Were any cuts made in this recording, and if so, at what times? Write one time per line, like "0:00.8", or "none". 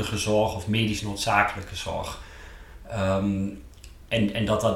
none